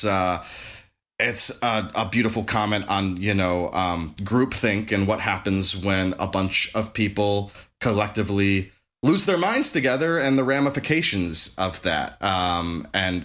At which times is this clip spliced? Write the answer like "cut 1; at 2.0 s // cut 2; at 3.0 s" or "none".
none